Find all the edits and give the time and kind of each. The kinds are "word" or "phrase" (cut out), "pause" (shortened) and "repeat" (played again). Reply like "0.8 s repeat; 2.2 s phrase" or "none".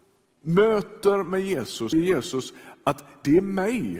1.9 s phrase